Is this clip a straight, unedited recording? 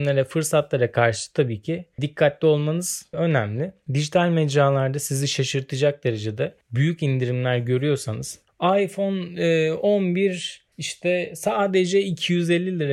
no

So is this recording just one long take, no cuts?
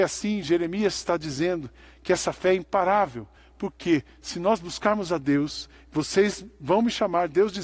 yes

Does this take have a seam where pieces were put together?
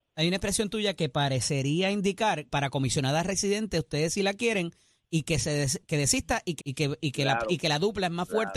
yes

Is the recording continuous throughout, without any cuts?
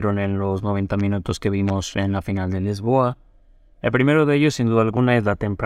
yes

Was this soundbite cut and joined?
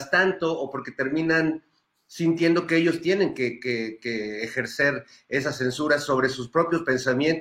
no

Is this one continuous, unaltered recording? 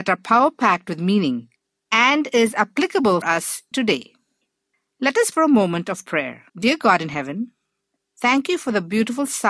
no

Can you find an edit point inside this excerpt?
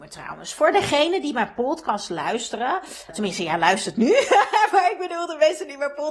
yes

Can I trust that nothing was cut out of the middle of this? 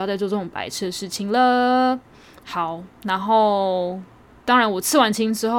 yes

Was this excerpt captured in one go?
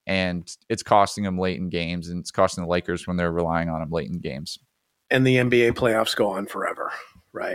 yes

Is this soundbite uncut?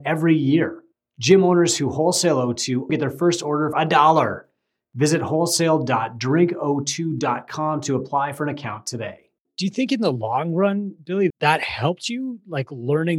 no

